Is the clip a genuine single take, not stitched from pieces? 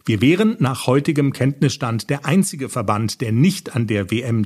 yes; 0 cuts

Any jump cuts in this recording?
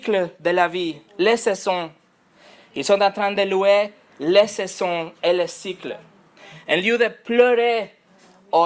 no; 0 cuts

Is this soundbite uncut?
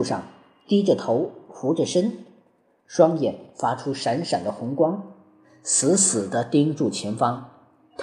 yes; 0 cuts

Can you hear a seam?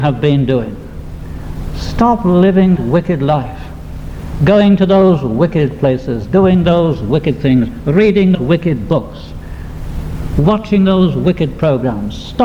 yes; 2 cuts; at 2.8 s, 8.3 s

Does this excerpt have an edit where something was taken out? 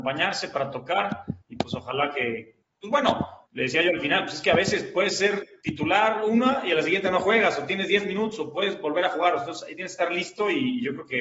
yes; 2 cuts; at 1.4 s, 3.4 s

